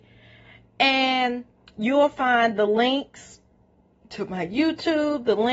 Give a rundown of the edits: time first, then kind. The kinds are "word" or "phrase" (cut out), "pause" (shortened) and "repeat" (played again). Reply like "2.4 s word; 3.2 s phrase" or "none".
none